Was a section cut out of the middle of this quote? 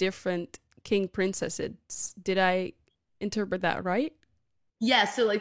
no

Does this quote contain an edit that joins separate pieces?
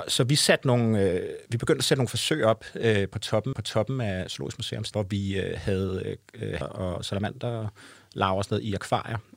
yes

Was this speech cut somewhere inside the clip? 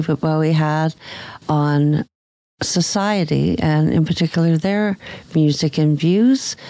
no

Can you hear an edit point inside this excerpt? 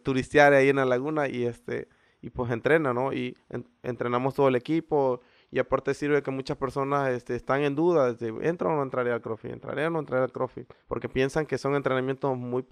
yes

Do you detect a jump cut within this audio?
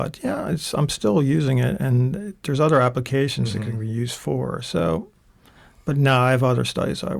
no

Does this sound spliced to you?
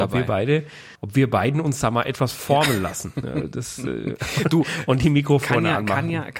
yes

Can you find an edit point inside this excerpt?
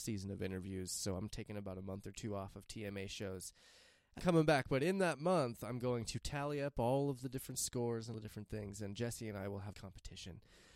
yes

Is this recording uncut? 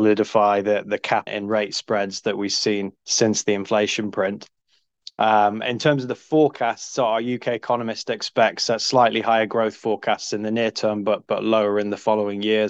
no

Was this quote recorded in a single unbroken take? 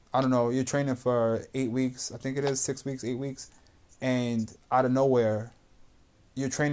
yes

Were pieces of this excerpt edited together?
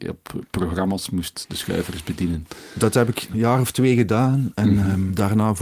no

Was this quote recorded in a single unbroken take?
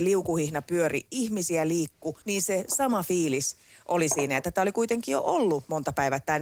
no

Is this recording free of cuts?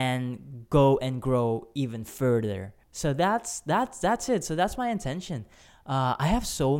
no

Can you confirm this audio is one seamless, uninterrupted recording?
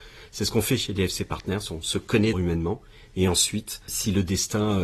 no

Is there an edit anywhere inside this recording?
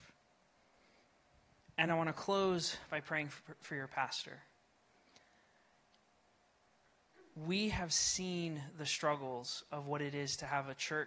no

